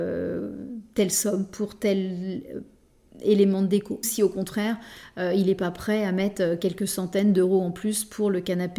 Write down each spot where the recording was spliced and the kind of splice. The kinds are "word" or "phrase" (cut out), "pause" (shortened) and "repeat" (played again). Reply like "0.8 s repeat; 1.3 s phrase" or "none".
4.0 s word